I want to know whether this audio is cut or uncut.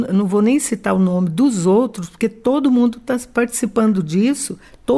uncut